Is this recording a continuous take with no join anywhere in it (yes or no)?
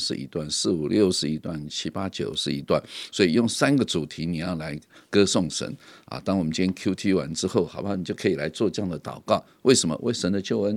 yes